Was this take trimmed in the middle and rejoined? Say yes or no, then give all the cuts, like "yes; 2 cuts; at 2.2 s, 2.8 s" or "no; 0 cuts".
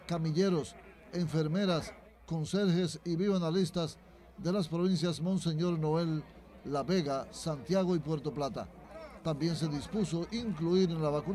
no; 0 cuts